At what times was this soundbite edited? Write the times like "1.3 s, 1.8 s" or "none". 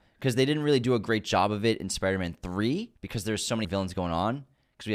3.0 s, 3.6 s